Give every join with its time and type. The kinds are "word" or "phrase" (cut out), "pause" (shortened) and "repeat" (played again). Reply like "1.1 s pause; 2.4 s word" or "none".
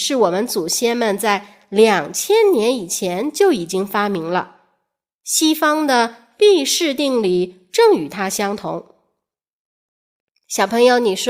none

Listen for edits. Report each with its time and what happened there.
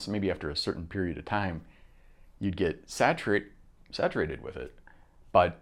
none

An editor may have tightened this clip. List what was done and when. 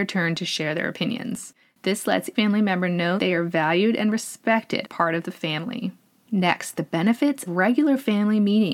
2.3 s word; 3.2 s word; 4.8 s word; 7.5 s word

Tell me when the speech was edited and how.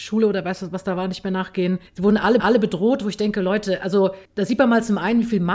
1.9 s pause; 2.4 s repeat; 4.3 s pause

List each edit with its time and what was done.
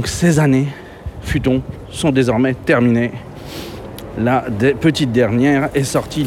none

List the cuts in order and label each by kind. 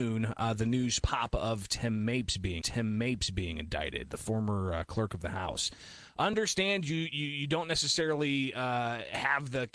2.6 s repeat

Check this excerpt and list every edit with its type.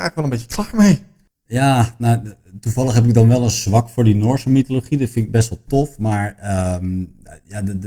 none

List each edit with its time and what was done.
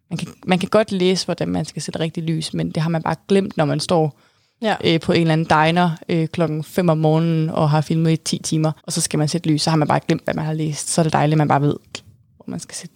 8.8 s pause

